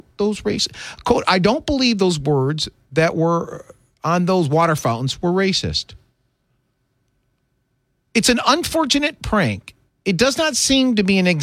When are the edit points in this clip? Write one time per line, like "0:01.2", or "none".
none